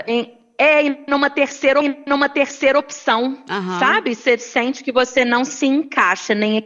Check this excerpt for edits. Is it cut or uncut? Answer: cut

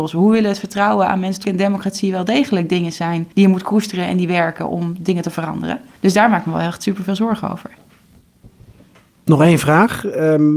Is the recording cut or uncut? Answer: cut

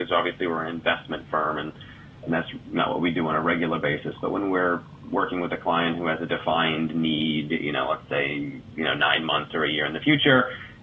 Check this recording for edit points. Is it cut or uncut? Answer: uncut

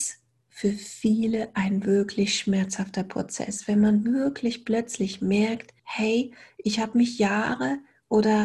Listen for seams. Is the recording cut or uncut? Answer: cut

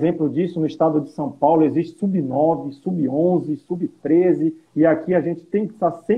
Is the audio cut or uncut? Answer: cut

